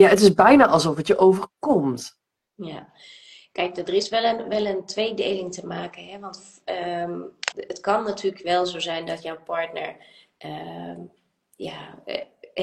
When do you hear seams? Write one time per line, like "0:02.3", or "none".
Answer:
0:07.5